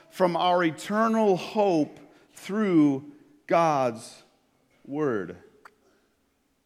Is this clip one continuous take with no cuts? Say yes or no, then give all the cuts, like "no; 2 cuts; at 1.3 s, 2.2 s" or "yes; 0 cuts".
yes; 0 cuts